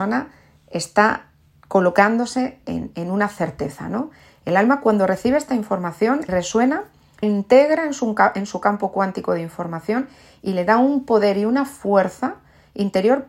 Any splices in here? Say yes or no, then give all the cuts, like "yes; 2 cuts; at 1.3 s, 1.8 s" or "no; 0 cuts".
yes; 3 cuts; at 2.6 s, 6.3 s, 7.2 s